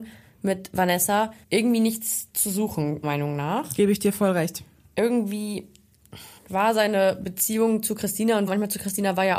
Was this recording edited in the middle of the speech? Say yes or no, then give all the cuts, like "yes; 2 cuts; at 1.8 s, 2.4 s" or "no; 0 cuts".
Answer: yes; 4 cuts; at 1.4 s, 3.0 s, 6.4 s, 8.5 s